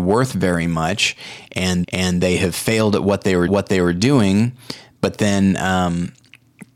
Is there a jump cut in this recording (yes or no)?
yes